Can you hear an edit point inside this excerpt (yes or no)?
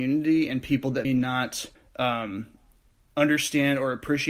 yes